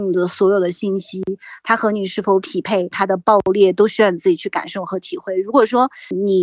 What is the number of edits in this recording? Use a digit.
1